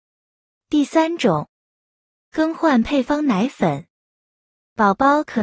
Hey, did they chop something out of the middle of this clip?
no; 0 cuts

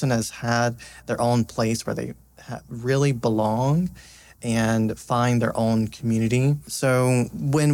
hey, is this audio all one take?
yes; 0 cuts

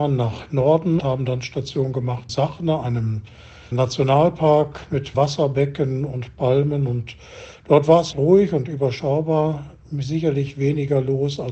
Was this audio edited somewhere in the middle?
yes; 5 cuts; at 1.0 s, 2.3 s, 3.7 s, 5.1 s, 8.1 s

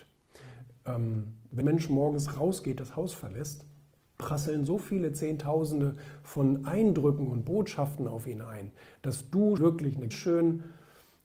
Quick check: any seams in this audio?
yes; 4 cuts; at 1.6 s, 4.2 s, 9.6 s, 10.1 s

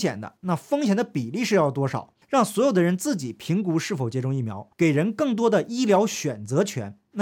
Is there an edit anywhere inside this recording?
yes; 2 cuts; at 2.2 s, 4.7 s

